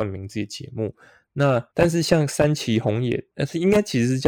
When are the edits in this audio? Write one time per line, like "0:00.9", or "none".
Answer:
0:01.7